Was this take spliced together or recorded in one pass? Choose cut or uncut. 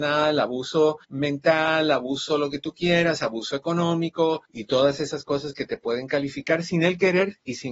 cut